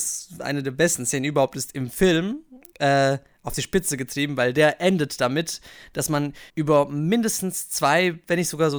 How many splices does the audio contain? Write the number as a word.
one